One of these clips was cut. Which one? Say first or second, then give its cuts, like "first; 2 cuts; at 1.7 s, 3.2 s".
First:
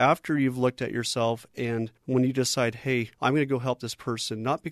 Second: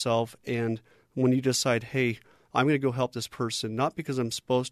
first; 2 cuts; at 2.0 s, 3.1 s